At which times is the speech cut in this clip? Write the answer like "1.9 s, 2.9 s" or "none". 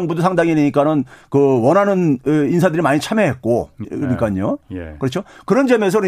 3.8 s